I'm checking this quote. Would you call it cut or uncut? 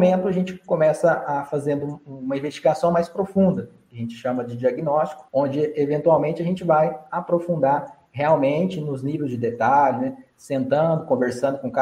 cut